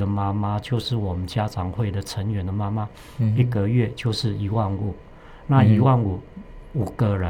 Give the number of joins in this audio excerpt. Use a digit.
0